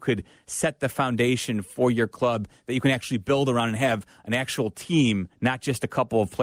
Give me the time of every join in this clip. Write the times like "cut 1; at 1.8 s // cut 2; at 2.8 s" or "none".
cut 1; at 5.3 s